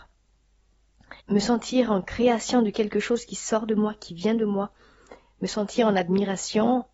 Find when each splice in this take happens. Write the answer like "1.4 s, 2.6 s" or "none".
1.2 s